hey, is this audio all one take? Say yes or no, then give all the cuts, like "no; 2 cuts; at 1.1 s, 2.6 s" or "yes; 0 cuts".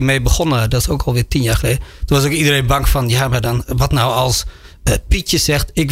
yes; 0 cuts